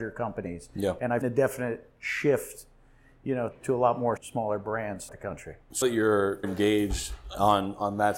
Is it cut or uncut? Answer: cut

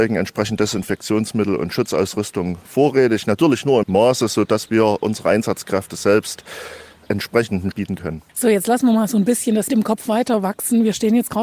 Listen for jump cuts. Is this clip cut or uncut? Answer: cut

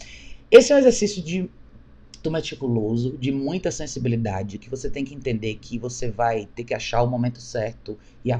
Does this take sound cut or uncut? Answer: cut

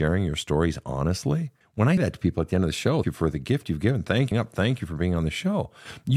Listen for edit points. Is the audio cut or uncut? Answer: cut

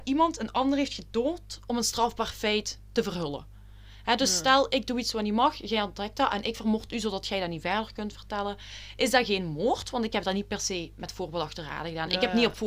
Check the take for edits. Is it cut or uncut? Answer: uncut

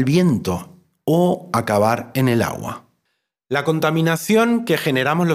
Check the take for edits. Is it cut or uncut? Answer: uncut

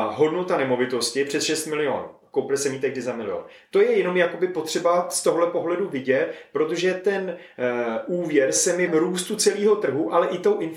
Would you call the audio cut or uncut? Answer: cut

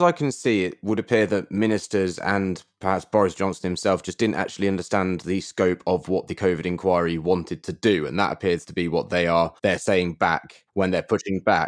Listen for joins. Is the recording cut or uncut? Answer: cut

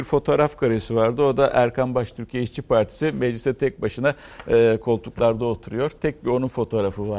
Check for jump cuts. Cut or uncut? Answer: uncut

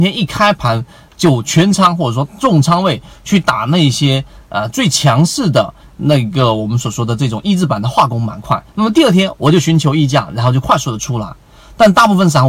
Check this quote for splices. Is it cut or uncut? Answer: cut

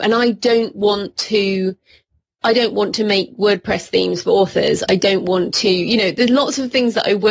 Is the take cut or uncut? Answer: uncut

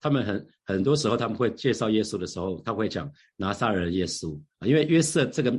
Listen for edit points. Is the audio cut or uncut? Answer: uncut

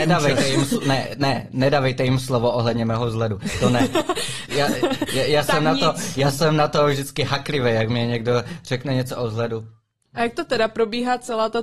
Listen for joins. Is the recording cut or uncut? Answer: uncut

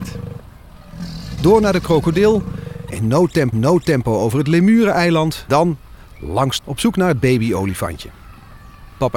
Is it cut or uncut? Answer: cut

